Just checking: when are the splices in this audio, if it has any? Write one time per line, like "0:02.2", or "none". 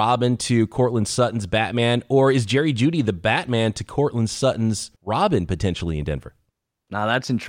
0:05.0